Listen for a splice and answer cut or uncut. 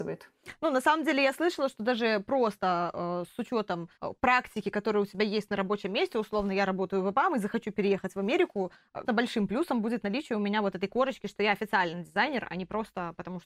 cut